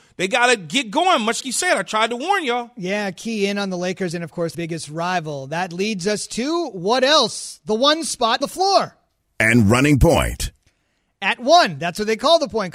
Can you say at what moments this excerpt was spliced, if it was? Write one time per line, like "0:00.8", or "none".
0:01.4
0:04.5
0:08.4